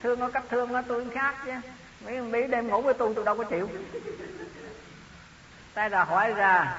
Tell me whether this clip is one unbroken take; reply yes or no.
no